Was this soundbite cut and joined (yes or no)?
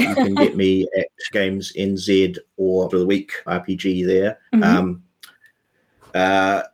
yes